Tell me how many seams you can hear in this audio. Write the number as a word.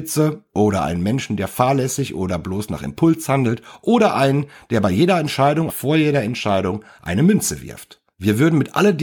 one